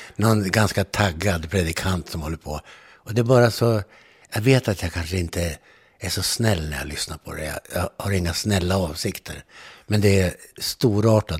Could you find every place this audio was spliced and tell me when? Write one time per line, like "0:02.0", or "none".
none